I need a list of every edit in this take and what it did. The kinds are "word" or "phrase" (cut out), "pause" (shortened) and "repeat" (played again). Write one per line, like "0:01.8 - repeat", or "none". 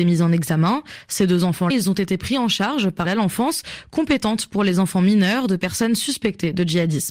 0:01.7 - word
0:03.0 - phrase

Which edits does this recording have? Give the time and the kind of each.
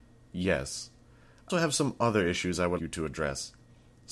0:01.5 - word
0:02.8 - word

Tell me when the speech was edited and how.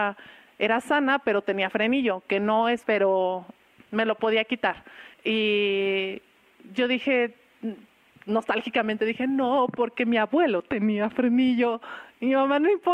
0:02.8 - phrase

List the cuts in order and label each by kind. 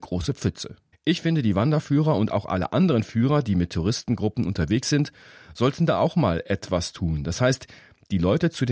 0:00.9 - pause

